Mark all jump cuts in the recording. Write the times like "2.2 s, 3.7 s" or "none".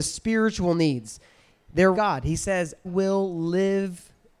1.9 s, 2.8 s